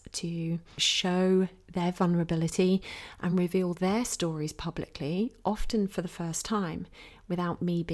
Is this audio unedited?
yes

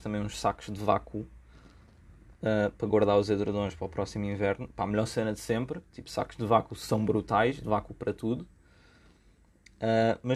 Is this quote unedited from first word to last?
no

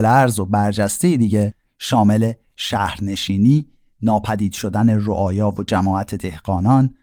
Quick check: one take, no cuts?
yes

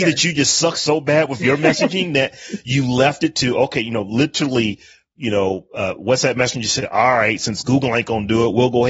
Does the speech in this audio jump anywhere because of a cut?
no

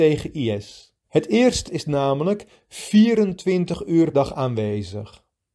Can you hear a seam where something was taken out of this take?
yes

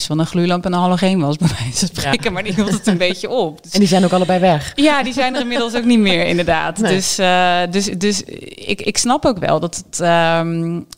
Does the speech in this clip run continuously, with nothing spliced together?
yes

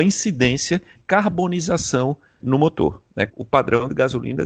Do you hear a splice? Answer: yes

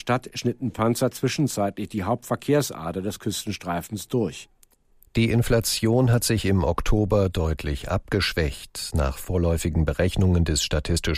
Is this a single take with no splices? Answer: yes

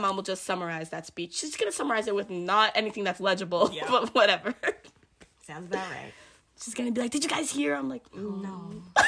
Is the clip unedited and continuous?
yes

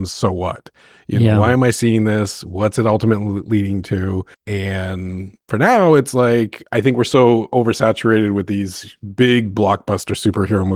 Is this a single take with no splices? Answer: no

